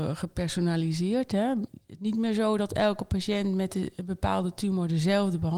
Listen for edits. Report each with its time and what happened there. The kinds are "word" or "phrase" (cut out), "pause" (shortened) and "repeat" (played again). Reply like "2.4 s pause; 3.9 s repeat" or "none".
2.0 s word